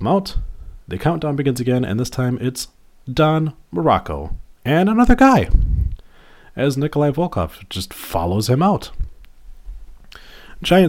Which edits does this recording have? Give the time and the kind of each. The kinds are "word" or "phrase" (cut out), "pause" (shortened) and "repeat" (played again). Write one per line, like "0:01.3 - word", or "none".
none

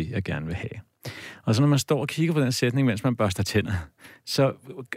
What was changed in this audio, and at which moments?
none

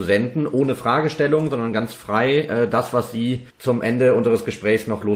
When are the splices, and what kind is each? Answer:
0:03.5 - pause

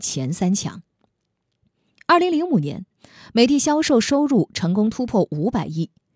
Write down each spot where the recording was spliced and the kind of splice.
none

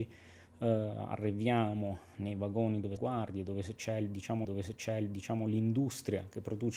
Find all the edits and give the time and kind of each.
0:03.0 - phrase
0:04.4 - repeat

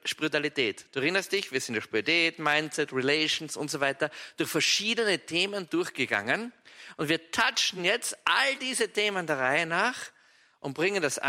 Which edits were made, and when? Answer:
none

